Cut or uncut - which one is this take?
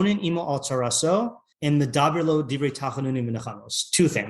cut